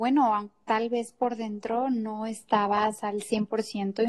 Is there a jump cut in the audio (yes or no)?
no